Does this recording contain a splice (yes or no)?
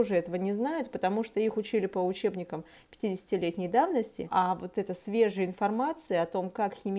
no